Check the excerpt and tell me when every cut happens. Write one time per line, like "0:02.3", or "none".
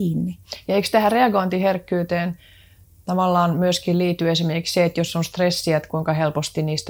none